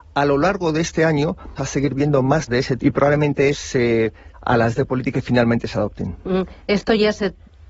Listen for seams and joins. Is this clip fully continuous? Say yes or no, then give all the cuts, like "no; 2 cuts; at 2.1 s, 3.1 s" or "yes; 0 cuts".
no; 7 cuts; at 1.6 s, 2.5 s, 2.8 s, 3.5 s, 4.3 s, 4.8 s, 5.1 s